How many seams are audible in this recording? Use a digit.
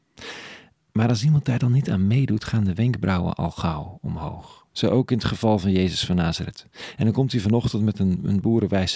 1